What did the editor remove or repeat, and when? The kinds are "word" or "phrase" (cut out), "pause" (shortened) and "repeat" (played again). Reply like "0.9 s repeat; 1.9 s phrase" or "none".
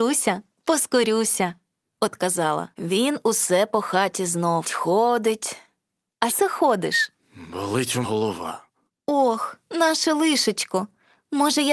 2.7 s pause; 4.6 s word; 6.3 s phrase; 8.0 s word